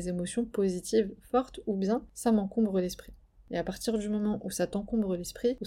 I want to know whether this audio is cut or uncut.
uncut